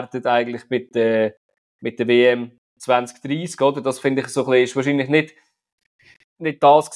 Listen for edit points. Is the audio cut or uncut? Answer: uncut